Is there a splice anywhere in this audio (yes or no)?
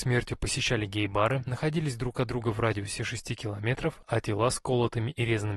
no